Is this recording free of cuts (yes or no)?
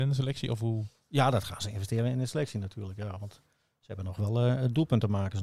yes